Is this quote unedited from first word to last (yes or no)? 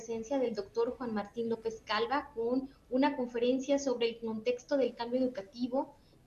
yes